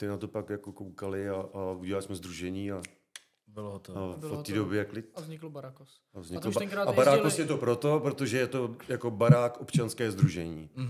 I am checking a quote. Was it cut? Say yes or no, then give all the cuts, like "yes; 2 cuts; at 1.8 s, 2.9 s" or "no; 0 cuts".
no; 0 cuts